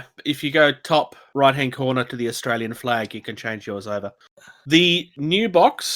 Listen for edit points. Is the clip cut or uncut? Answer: uncut